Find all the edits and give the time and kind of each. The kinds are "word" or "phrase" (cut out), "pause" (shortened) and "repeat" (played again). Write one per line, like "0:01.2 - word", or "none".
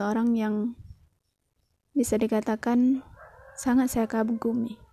none